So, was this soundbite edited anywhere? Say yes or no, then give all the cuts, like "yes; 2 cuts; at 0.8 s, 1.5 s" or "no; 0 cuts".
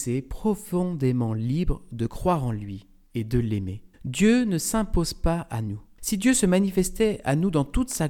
yes; 1 cut; at 3.9 s